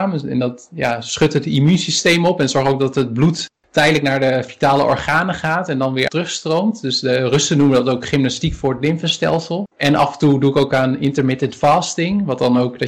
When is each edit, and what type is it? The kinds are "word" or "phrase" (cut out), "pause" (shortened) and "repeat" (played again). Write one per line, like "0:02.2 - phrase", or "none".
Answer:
0:06.1 - phrase
0:09.7 - pause